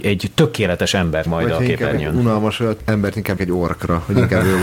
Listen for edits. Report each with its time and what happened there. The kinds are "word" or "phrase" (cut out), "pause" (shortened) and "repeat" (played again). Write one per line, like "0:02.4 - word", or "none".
0:01.3 - word
0:02.8 - word
0:03.4 - word